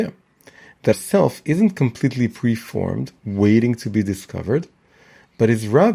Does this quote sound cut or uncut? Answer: cut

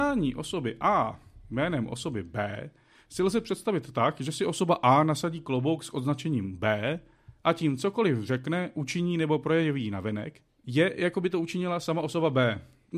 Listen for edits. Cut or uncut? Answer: uncut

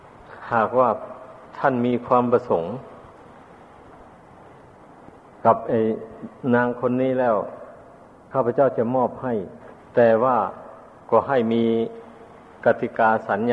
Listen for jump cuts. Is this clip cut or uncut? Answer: cut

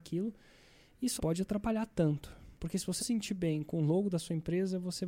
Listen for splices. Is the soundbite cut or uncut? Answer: cut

